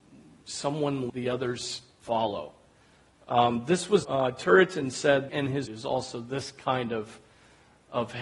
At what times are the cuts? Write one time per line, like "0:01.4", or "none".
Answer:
0:01.1
0:04.0
0:05.3
0:05.7